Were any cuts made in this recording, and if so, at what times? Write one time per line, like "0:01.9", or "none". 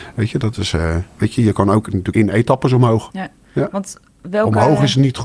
0:01.2
0:02.1

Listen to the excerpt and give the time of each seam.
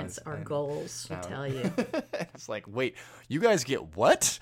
0:01.1
0:02.3

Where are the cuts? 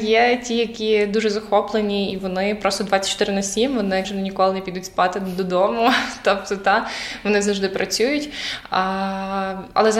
0:04.0

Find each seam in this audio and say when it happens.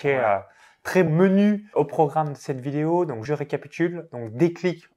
0:01.1
0:01.7
0:03.3

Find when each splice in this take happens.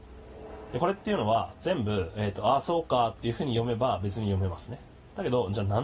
none

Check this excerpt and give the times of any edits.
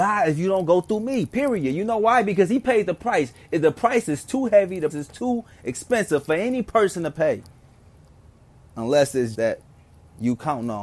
0:04.9
0:09.3

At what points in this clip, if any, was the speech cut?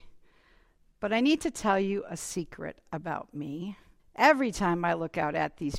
0:04.0

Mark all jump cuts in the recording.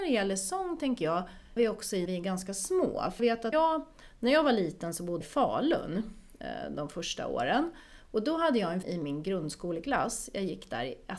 0:01.6
0:02.1
0:03.2
0:03.5
0:05.2
0:08.8

